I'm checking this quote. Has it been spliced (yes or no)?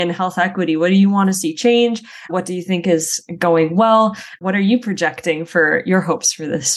no